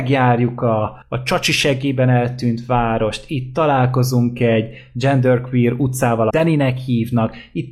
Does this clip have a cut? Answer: yes; 2 cuts; at 1.0 s, 6.3 s

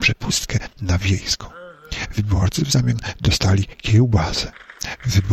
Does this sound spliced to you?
no; 0 cuts

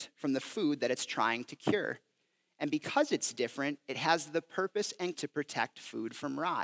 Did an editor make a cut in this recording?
yes; 1 cut; at 5.1 s

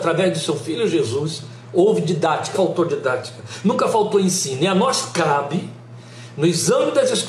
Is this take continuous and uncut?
no; 1 cut; at 2.5 s

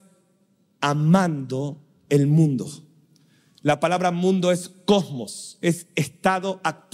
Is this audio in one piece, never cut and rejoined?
yes; 0 cuts

